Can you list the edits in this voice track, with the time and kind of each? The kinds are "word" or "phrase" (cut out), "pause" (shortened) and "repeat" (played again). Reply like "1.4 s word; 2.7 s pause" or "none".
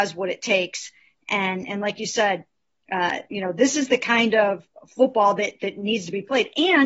none